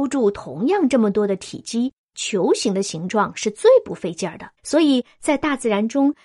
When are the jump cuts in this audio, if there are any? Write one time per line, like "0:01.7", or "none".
0:04.6